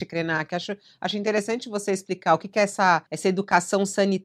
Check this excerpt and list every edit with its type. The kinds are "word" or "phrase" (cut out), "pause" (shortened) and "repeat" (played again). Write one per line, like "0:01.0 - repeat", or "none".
0:03.1 - pause